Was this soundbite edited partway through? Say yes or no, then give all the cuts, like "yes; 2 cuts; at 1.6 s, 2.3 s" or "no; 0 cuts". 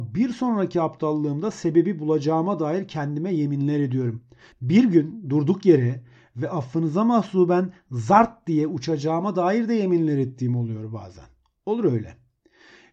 no; 0 cuts